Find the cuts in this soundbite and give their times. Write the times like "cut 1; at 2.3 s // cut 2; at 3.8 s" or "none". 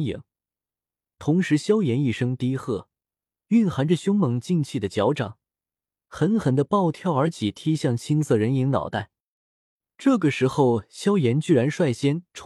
none